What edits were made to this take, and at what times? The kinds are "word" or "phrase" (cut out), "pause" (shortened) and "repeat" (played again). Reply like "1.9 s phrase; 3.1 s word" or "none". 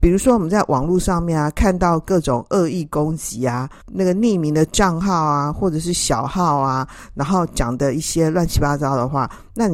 3.8 s pause

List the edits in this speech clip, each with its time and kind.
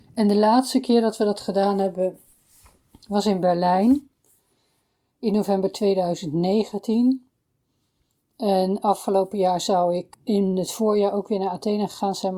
none

